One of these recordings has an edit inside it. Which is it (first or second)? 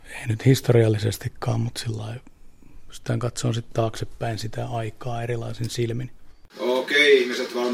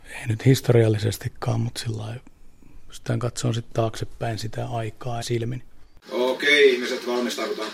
second